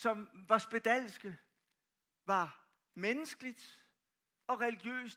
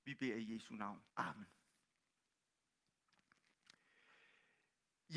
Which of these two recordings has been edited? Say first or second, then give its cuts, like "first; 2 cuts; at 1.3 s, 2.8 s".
second; 1 cut; at 1.1 s